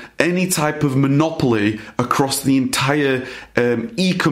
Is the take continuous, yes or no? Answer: yes